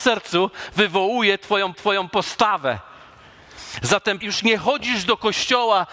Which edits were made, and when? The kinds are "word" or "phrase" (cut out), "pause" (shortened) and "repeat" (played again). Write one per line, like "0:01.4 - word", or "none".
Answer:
0:01.7 - repeat
0:04.2 - word